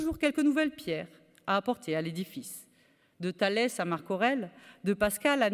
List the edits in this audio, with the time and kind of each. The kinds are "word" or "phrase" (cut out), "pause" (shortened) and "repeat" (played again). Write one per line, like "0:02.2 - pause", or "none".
none